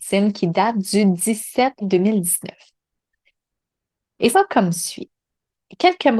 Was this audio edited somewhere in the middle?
yes; 2 cuts; at 1.8 s, 4.3 s

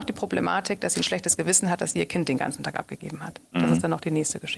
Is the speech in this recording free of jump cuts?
yes; 0 cuts

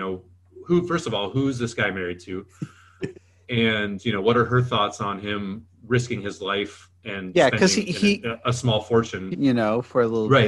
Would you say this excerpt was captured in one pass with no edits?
no; 2 cuts; at 3.1 s, 9.3 s

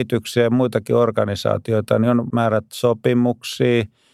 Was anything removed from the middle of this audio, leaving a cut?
yes; 1 cut; at 2.3 s

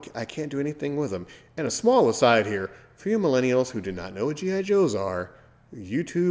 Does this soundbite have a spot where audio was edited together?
no; 0 cuts

